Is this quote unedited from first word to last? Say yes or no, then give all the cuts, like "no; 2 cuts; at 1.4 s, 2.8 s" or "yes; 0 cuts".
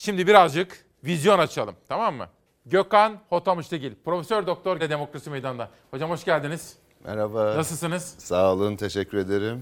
no; 3 cuts; at 0.9 s, 2.5 s, 4.8 s